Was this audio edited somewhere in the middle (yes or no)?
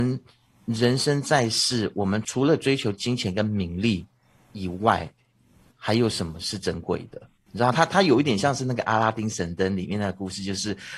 no